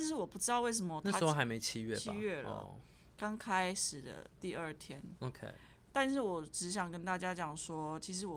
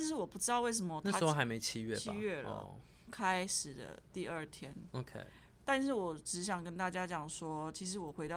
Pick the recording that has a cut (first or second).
second